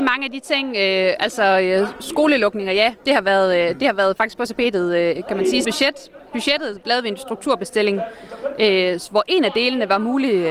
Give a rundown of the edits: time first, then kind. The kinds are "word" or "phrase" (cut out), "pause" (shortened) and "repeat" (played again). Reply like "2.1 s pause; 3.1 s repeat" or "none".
5.6 s word